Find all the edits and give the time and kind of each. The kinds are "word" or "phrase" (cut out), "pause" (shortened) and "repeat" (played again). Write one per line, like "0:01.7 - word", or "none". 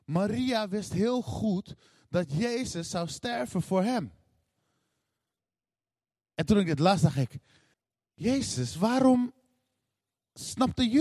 0:07.7 - pause